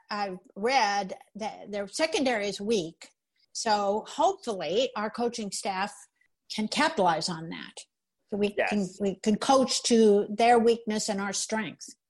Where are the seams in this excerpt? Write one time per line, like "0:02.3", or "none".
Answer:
0:09.0